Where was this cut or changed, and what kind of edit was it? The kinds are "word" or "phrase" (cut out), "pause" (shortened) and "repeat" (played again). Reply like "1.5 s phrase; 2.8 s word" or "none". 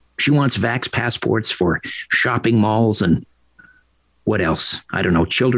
none